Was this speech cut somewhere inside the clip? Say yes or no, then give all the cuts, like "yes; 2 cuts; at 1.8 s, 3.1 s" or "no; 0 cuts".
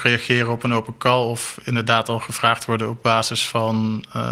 no; 0 cuts